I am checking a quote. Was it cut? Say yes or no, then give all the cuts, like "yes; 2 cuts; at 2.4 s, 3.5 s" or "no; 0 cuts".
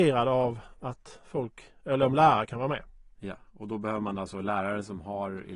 no; 0 cuts